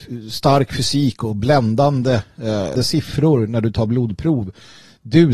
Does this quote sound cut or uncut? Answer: cut